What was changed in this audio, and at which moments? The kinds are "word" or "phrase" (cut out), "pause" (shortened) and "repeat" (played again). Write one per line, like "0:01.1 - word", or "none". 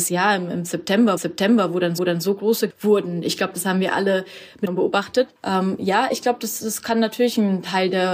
0:01.2 - repeat
0:02.0 - repeat
0:02.7 - phrase
0:04.7 - phrase
0:05.4 - pause